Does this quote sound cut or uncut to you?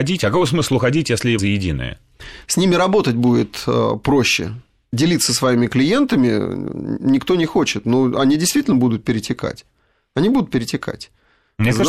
cut